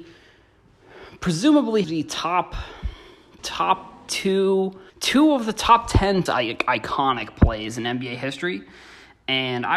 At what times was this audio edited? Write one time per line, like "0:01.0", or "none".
0:01.8
0:03.4
0:04.9
0:06.3